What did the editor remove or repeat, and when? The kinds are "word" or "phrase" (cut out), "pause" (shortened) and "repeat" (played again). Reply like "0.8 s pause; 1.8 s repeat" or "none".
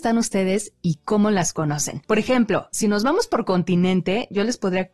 none